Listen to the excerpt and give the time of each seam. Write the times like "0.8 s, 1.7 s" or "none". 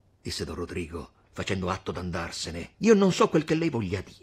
2.7 s